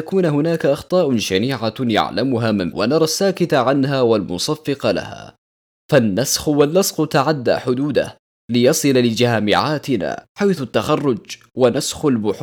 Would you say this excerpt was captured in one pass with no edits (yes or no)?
no